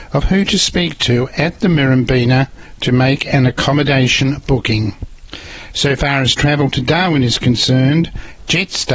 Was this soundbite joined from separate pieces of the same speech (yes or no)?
no